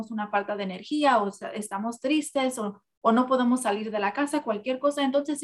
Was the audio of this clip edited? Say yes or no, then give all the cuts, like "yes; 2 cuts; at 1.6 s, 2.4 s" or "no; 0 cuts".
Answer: no; 0 cuts